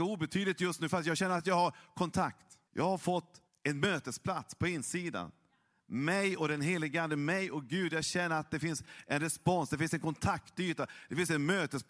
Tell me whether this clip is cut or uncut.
cut